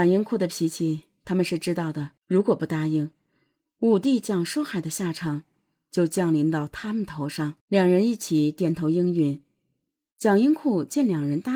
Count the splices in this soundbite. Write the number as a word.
two